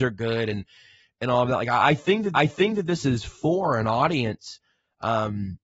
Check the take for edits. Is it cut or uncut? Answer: cut